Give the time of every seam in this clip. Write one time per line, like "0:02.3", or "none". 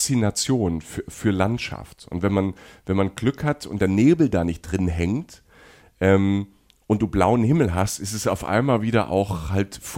none